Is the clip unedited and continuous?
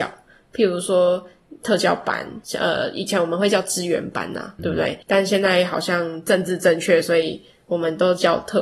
no; 3 cuts; at 2.4 s, 4.6 s, 5.0 s

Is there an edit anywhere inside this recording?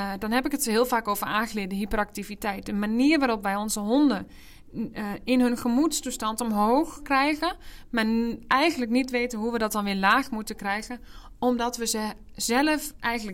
no; 0 cuts

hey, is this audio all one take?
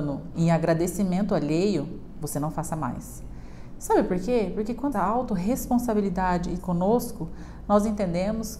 no; 2 cuts; at 4.9 s, 6.6 s

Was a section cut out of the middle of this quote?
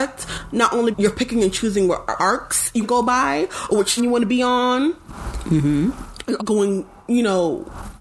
yes; 5 cuts; at 0.9 s, 2.2 s, 2.8 s, 4.0 s, 6.4 s

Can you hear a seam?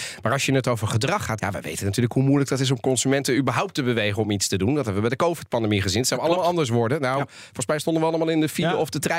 yes; 1 cut; at 1.4 s

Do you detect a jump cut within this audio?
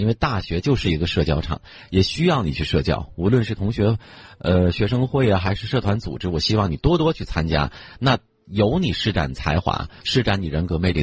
no; 0 cuts

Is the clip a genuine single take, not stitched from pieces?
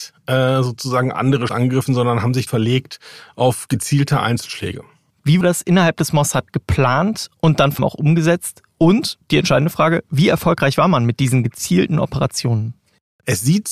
no; 5 cuts; at 1.5 s, 2.5 s, 5.4 s, 7.8 s, 9.2 s

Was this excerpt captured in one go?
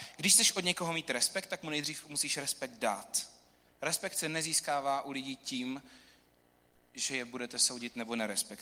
yes; 0 cuts

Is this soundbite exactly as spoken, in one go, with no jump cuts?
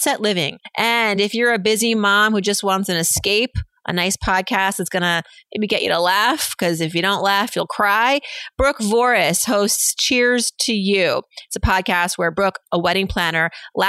yes; 0 cuts

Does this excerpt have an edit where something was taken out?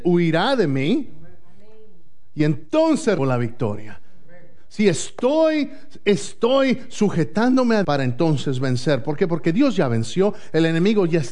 yes; 2 cuts; at 3.2 s, 7.8 s

